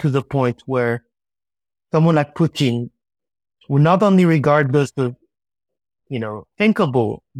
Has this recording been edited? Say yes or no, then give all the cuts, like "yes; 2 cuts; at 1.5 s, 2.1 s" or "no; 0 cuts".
no; 0 cuts